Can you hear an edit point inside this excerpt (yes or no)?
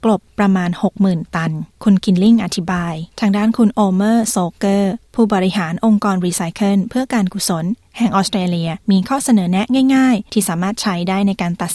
yes